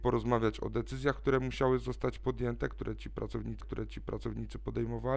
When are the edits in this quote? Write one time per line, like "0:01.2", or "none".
0:03.6

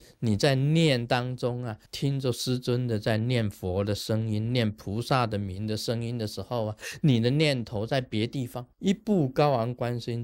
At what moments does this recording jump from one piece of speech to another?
0:01.9
0:08.7

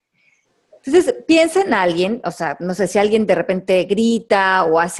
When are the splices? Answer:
none

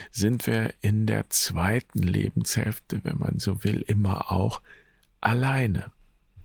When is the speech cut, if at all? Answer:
none

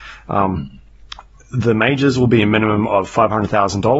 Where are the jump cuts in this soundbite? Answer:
none

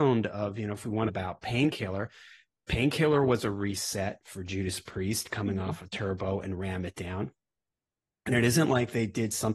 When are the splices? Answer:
0:01.1

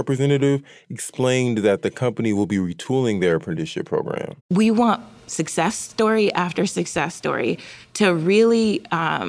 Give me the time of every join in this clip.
0:04.4

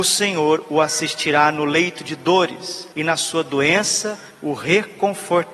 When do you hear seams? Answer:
0:02.9
0:04.3

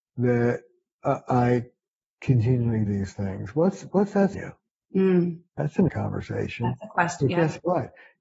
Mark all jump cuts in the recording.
0:02.9
0:04.3
0:05.5
0:05.9

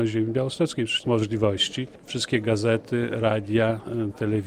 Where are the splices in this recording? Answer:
0:01.0

